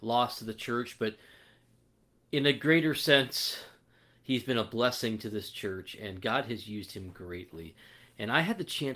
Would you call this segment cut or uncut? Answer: uncut